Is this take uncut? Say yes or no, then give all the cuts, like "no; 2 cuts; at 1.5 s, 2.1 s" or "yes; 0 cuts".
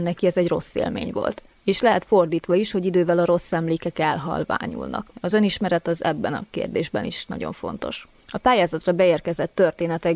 yes; 0 cuts